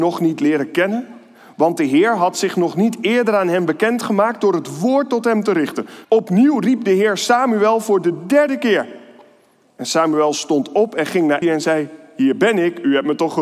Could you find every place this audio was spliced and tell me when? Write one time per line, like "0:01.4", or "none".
0:06.0
0:11.4